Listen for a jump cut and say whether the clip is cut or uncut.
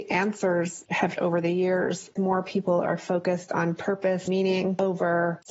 cut